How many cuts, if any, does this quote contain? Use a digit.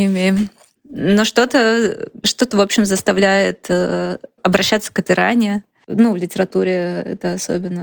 0